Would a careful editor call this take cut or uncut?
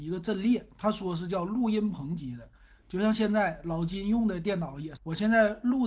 cut